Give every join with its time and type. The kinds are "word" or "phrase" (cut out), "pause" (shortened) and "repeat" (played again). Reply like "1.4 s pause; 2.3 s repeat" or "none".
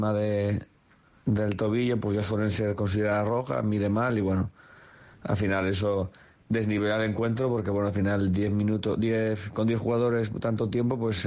none